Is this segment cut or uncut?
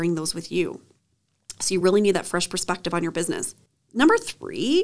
uncut